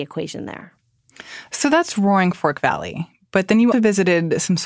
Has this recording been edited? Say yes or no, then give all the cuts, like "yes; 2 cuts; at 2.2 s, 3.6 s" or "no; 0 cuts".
yes; 1 cut; at 3.7 s